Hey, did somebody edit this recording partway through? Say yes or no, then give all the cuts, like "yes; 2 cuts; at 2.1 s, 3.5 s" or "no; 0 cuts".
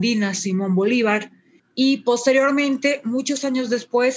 yes; 1 cut; at 1.6 s